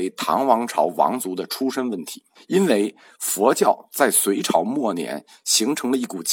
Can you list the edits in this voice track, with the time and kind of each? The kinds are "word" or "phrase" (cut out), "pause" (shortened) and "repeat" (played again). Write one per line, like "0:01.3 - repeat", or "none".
0:02.3 - pause